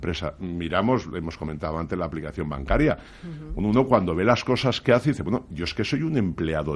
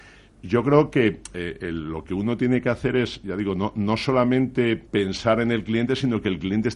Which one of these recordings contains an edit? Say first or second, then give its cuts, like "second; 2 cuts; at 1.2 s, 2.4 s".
second; 1 cut; at 4.9 s